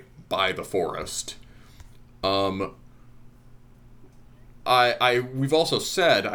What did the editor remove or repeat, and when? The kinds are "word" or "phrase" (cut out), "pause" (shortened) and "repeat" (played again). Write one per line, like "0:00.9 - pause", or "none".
0:04.6 - word